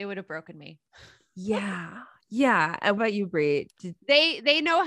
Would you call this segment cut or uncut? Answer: cut